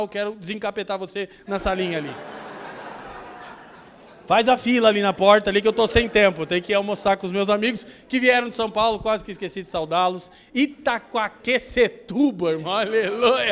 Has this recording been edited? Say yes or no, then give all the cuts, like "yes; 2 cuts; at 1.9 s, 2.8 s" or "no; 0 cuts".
no; 0 cuts